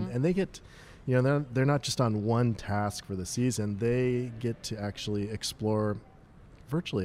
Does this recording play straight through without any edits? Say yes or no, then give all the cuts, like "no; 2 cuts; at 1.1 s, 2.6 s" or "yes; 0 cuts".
yes; 0 cuts